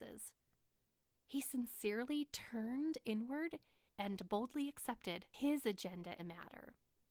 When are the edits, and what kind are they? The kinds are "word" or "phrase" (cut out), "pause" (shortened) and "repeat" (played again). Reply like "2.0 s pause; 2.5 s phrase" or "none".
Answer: 6.2 s word